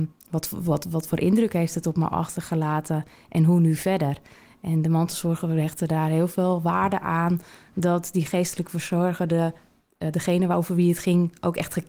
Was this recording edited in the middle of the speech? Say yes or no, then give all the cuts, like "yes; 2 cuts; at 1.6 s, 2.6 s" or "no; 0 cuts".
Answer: no; 0 cuts